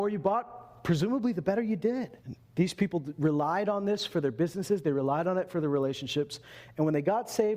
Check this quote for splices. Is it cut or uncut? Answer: cut